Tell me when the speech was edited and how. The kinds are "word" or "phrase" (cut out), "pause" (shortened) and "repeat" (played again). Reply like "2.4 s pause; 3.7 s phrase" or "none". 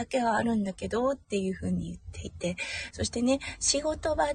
2.9 s phrase

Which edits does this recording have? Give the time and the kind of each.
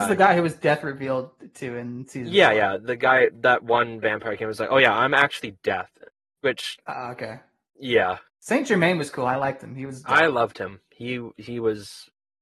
6.3 s pause; 8.3 s pause

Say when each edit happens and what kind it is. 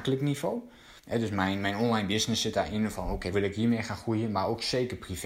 1.0 s pause; 3.3 s word

